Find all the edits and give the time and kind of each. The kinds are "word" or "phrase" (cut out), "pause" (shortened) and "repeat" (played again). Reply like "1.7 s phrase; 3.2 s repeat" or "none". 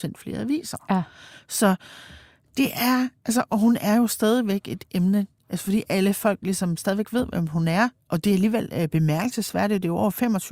none